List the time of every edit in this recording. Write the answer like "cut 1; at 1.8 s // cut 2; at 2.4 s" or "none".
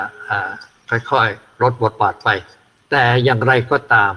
none